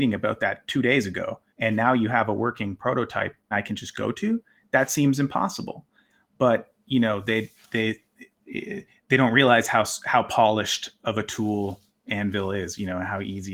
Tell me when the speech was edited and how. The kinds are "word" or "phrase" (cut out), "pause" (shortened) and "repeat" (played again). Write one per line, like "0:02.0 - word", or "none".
0:01.5 - pause
0:03.5 - word
0:08.3 - pause